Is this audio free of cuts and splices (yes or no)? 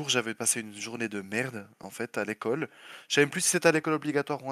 yes